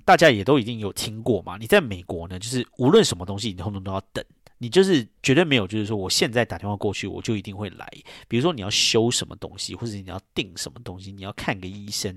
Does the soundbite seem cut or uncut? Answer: uncut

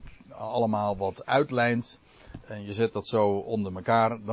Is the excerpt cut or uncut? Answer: uncut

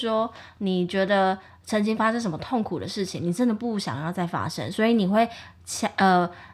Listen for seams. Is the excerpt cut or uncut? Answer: uncut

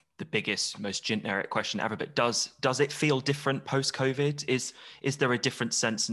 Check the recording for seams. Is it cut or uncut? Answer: uncut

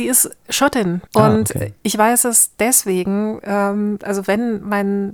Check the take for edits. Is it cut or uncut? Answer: cut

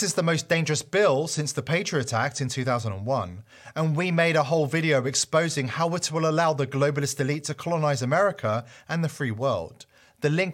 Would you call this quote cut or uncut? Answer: uncut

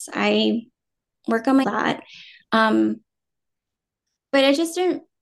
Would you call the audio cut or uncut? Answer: cut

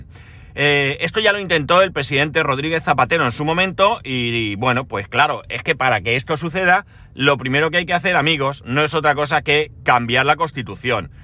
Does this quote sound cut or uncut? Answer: uncut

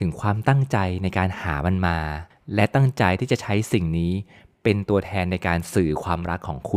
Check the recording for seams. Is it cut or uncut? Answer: uncut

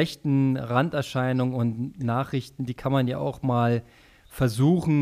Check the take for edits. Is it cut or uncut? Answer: uncut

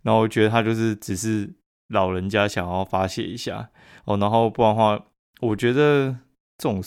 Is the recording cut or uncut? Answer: uncut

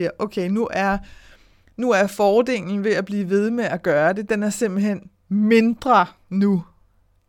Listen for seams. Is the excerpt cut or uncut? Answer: uncut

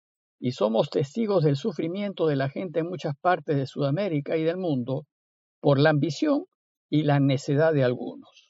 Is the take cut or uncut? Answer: uncut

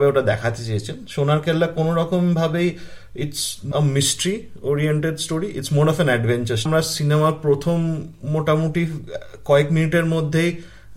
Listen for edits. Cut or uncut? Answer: cut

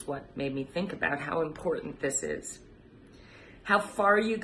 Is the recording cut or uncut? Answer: uncut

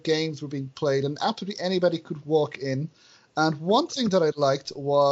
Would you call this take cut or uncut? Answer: uncut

